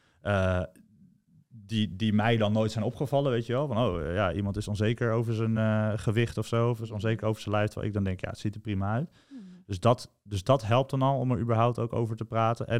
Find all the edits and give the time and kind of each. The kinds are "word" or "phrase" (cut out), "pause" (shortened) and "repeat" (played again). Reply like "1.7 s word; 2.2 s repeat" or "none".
none